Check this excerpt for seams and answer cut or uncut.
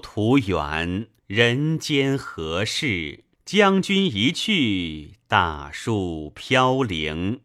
cut